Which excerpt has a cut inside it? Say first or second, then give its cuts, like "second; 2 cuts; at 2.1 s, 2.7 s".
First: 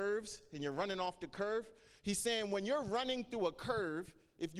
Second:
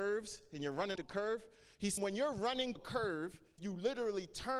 second; 4 cuts; at 1.0 s, 2.0 s, 2.8 s, 3.6 s